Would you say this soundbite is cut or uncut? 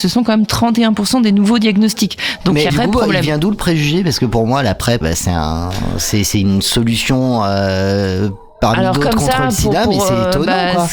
cut